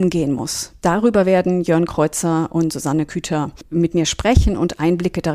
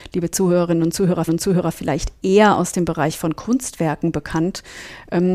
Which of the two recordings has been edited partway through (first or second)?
second